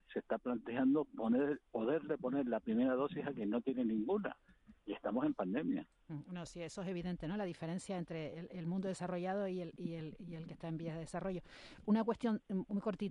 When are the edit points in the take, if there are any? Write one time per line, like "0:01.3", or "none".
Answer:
0:04.8

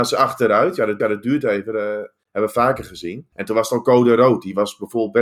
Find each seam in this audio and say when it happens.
0:01.0

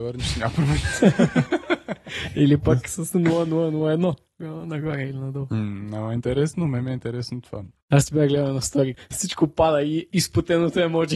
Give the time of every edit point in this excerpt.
0:03.1
0:08.9

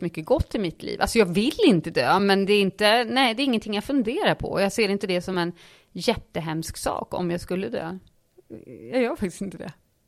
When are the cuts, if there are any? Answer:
none

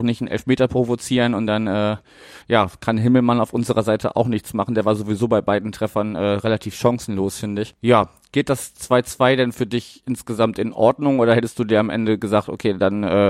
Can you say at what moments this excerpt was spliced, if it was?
0:02.4

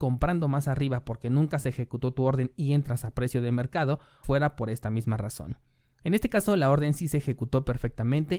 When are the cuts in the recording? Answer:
0:04.2

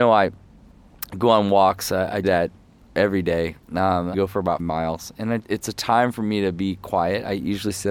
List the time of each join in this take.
0:02.2
0:04.1
0:04.6
0:05.4

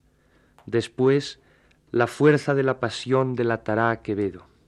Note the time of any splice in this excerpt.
none

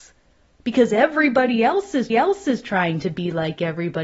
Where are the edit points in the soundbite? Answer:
0:02.1

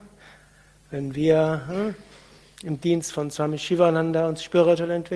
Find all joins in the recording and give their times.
none

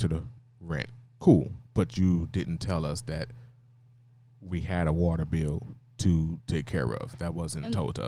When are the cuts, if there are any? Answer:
none

